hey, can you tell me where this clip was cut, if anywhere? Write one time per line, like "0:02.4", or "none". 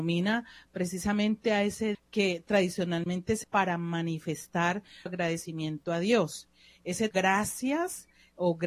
0:01.9
0:03.4
0:05.1
0:07.1